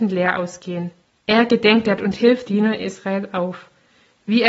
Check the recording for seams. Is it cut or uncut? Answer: cut